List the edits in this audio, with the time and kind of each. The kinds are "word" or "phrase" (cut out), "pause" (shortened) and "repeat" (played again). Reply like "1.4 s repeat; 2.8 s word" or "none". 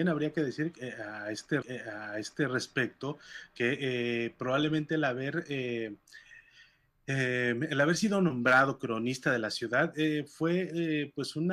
1.6 s repeat